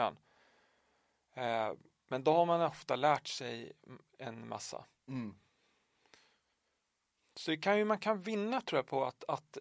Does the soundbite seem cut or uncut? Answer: uncut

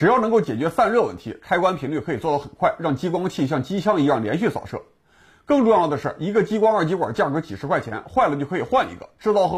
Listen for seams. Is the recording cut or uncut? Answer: uncut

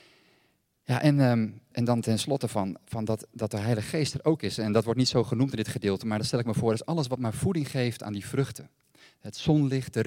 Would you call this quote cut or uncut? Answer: cut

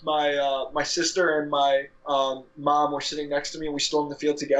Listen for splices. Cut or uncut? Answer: cut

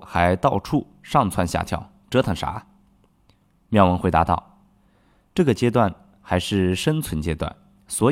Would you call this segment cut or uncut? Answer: uncut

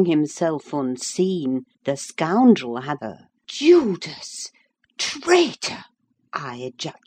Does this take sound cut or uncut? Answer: cut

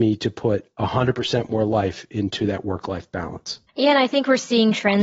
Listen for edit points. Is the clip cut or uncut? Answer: cut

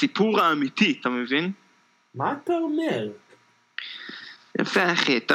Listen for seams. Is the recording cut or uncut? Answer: uncut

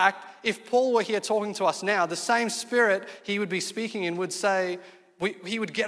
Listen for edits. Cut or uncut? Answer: uncut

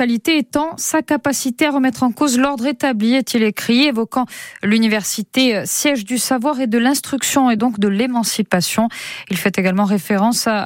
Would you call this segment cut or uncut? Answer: uncut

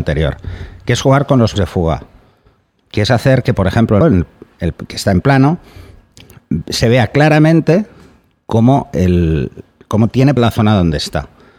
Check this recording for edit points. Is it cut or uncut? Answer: cut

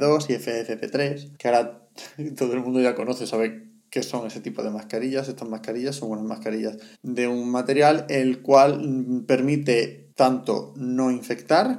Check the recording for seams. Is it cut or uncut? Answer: cut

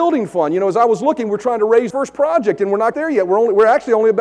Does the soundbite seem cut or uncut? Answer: cut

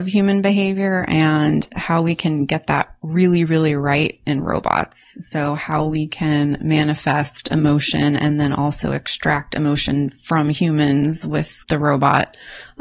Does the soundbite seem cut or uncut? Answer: cut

